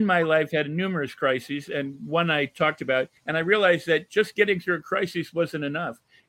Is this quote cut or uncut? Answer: cut